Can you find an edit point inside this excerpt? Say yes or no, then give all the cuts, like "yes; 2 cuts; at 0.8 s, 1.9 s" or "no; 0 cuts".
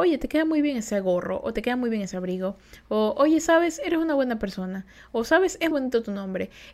yes; 1 cut; at 5.7 s